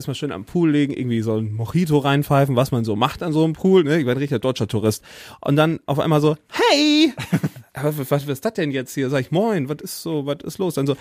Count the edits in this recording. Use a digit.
0